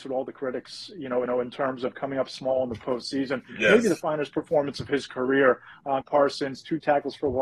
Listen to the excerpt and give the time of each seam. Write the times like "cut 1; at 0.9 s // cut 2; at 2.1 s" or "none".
cut 1; at 1.3 s // cut 2; at 6.0 s